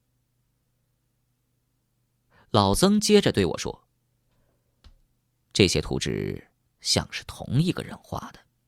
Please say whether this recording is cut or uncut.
uncut